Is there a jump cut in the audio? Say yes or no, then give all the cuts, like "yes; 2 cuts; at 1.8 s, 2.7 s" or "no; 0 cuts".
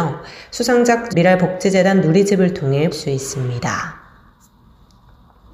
yes; 2 cuts; at 1.1 s, 2.9 s